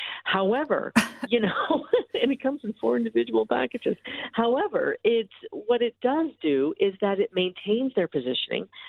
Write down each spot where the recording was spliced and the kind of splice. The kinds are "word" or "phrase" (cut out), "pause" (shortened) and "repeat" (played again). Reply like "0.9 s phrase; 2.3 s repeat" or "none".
1.3 s word